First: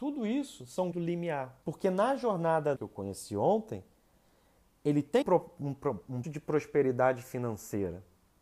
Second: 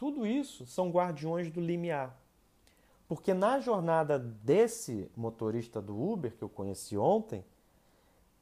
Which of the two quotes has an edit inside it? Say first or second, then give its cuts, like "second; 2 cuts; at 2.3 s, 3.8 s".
first; 5 cuts; at 0.9 s, 1.6 s, 2.8 s, 5.2 s, 6.2 s